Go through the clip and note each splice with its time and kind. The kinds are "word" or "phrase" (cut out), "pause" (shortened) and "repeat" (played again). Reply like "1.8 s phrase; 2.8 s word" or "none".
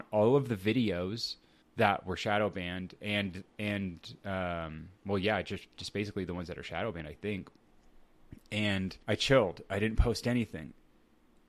1.6 s pause; 5.7 s pause; 9.0 s pause